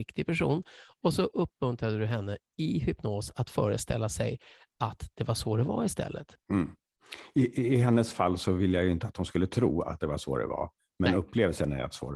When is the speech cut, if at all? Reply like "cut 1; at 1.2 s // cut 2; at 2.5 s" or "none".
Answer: cut 1; at 6.4 s

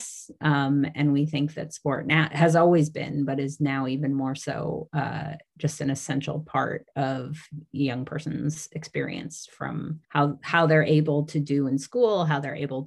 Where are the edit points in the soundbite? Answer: cut 1; at 7.5 s // cut 2; at 10.0 s

